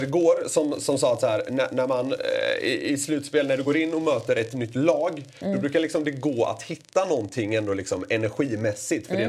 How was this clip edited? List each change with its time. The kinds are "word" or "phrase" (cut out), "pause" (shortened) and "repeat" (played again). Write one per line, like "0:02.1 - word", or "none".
none